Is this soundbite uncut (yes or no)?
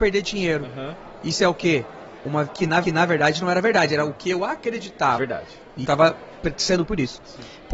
no